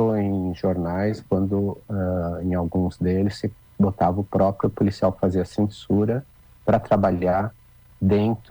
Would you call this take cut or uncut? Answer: uncut